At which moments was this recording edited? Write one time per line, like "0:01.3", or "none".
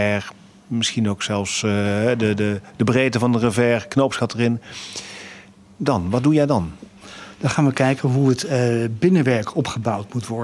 none